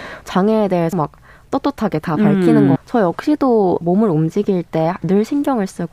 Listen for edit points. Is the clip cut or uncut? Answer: cut